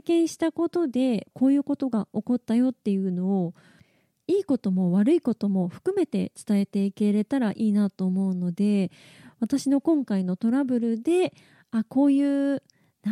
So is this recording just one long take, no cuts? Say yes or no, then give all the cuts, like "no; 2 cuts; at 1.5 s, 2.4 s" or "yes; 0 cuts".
yes; 0 cuts